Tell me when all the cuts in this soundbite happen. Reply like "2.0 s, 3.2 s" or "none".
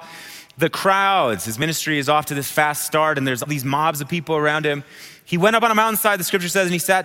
3.5 s